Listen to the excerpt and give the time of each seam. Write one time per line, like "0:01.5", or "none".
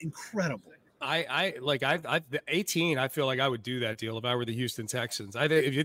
none